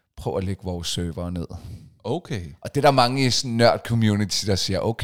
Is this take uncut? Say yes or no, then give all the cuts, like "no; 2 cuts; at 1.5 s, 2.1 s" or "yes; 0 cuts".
yes; 0 cuts